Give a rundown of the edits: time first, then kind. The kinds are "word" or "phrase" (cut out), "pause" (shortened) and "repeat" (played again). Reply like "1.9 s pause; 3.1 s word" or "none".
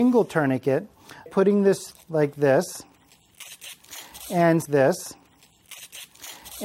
1.3 s word; 1.9 s word; 4.7 s repeat